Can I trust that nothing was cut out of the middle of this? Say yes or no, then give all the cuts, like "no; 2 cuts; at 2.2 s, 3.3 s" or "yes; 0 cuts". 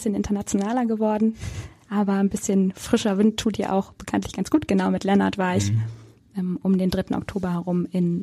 yes; 0 cuts